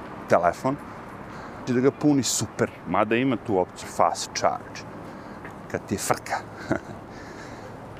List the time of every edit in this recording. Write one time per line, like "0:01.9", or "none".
0:01.7
0:02.9
0:03.8